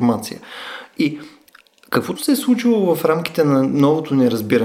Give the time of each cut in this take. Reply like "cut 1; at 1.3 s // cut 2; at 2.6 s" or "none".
cut 1; at 2.1 s